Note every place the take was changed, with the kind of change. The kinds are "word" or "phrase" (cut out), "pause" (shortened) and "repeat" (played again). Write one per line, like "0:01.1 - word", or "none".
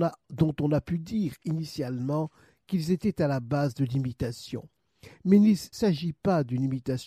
0:05.7 - phrase